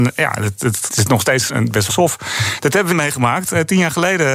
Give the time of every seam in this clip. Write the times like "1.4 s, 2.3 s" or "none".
0.9 s, 1.5 s, 1.9 s, 2.9 s